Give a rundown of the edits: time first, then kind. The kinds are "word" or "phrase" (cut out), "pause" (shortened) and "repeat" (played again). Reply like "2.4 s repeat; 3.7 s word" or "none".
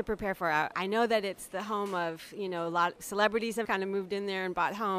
3.6 s word